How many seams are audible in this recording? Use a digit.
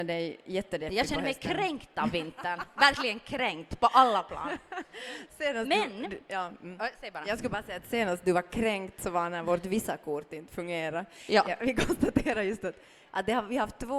0